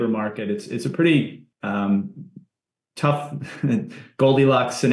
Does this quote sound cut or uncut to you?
cut